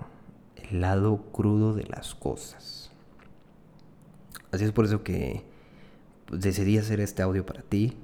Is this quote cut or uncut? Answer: uncut